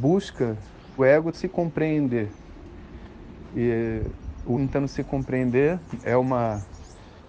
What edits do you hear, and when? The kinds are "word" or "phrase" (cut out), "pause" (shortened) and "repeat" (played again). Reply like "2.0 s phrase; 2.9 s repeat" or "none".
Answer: 1.0 s word; 1.3 s word; 4.5 s word; 6.0 s word